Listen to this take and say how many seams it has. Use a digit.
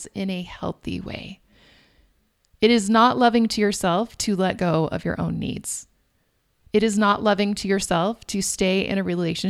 0